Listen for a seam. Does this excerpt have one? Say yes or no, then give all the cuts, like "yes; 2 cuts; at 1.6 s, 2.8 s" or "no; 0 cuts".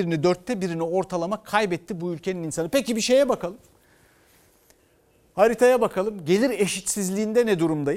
no; 0 cuts